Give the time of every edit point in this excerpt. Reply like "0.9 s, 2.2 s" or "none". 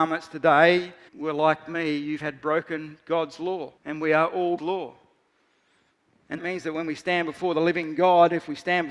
1.1 s, 2.2 s, 3.8 s, 4.6 s, 6.4 s

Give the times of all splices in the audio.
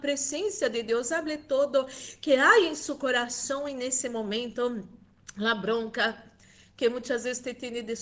none

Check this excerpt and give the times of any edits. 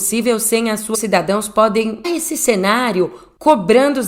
0.9 s, 2.0 s

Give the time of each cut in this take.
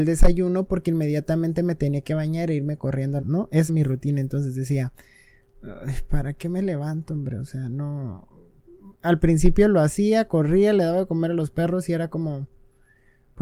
3.2 s, 3.7 s

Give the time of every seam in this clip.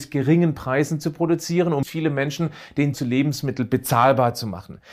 1.8 s, 2.9 s

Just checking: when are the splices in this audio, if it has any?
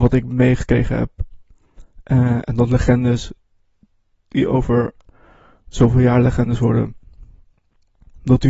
none

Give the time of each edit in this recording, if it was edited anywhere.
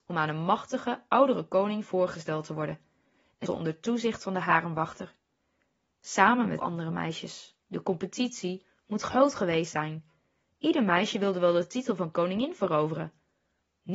3.5 s, 6.6 s, 7.6 s

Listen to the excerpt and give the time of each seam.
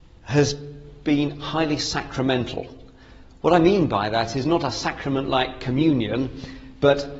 none

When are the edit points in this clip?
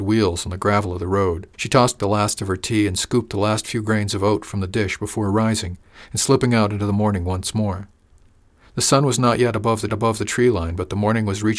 1.5 s, 2.0 s, 9.9 s

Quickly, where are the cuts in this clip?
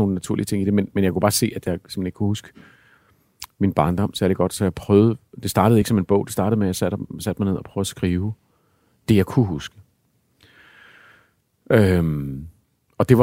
none

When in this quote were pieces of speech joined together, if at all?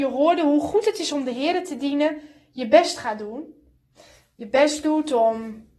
none

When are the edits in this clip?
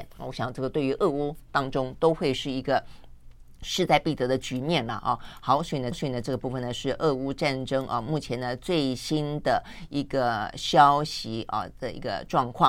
5.9 s

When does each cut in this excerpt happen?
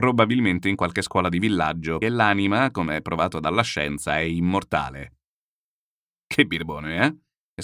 2.0 s

